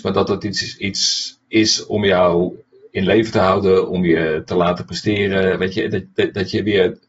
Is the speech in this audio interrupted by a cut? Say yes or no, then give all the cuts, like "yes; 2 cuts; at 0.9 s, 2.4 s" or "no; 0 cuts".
no; 0 cuts